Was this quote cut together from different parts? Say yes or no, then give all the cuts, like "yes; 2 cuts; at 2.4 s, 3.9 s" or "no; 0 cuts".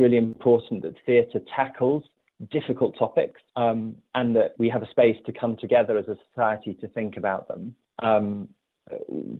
yes; 3 cuts; at 3.5 s, 4.6 s, 7.8 s